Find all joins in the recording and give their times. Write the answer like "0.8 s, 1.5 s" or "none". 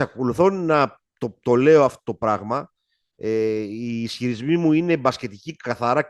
none